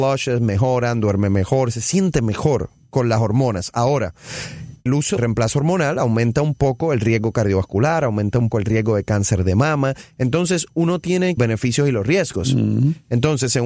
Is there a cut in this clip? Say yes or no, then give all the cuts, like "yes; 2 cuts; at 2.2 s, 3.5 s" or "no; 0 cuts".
yes; 4 cuts; at 4.9 s, 5.2 s, 8.5 s, 11.4 s